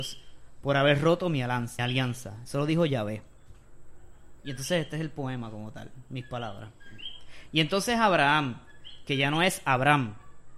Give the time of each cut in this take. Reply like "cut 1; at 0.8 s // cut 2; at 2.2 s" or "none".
cut 1; at 1.8 s // cut 2; at 4.4 s